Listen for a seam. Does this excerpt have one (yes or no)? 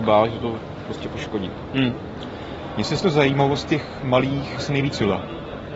yes